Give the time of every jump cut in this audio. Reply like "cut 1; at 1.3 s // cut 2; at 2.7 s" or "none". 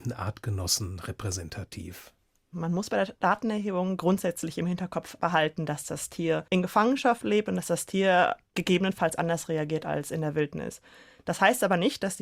cut 1; at 6.5 s